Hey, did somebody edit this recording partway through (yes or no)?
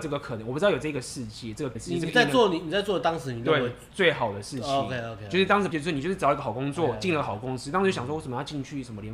yes